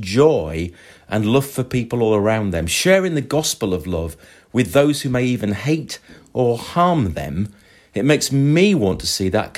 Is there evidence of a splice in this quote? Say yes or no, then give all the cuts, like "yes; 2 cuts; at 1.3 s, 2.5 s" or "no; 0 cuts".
no; 0 cuts